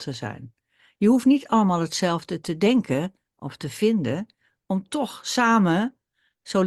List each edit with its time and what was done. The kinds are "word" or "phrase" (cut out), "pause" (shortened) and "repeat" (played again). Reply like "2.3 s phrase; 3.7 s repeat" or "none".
none